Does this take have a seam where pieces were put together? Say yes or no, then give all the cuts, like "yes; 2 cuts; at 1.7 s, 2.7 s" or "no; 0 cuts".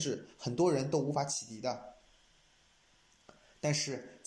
no; 0 cuts